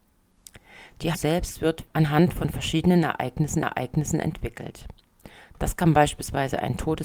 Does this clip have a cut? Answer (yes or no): yes